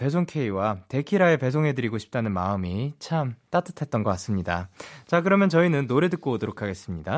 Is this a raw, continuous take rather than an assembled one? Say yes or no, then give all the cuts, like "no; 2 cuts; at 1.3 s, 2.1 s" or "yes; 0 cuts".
yes; 0 cuts